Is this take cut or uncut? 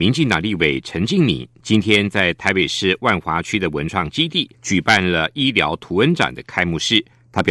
cut